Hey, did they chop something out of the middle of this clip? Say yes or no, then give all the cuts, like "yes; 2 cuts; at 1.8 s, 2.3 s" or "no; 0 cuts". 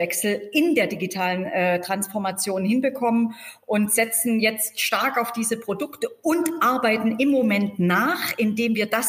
no; 0 cuts